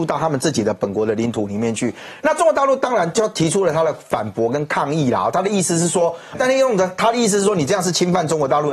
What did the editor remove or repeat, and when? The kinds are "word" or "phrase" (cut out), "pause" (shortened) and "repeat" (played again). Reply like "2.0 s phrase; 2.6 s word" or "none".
6.3 s word